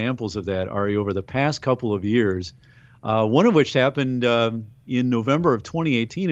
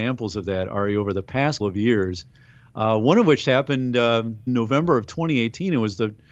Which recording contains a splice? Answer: second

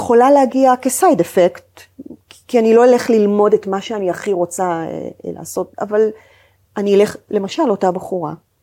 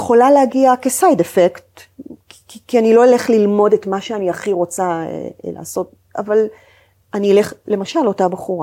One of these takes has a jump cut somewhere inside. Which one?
first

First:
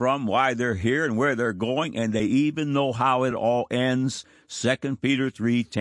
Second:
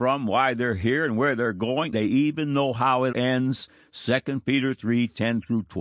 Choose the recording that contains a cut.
second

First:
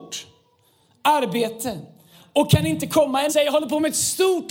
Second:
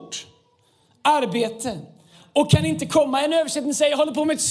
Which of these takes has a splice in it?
first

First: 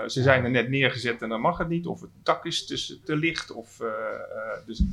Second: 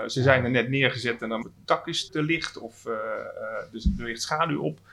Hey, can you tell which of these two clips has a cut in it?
second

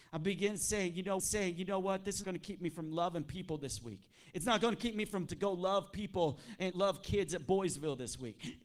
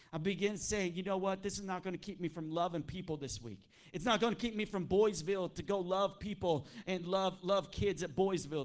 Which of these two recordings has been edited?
first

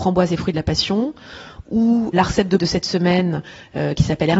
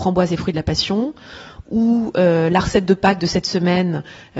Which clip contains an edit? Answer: first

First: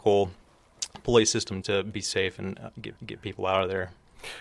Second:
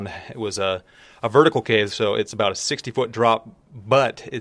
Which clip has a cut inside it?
first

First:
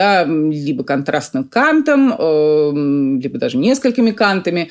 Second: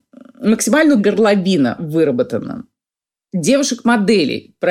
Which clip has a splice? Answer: second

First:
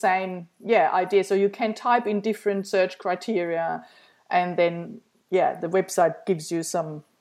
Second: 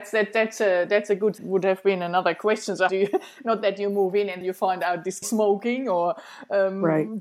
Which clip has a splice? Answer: second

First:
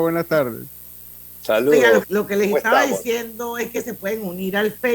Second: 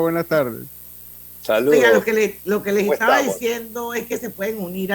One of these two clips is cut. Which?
first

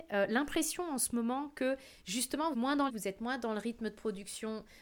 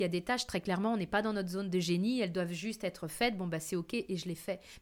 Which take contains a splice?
first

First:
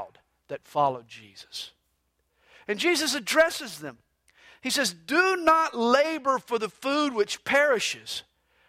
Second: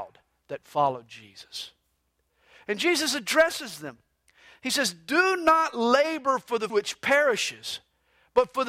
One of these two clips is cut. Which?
second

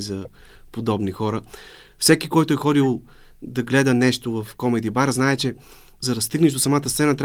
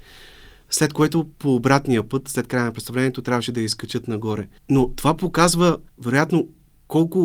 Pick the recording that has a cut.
second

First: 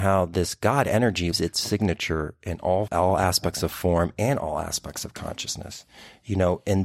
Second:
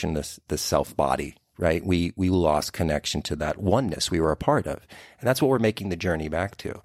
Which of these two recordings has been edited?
first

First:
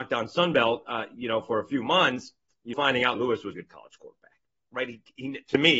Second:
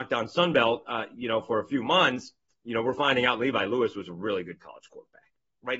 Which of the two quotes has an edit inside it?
first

